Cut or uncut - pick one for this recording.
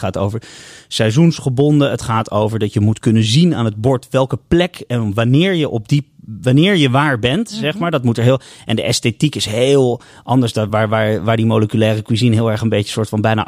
uncut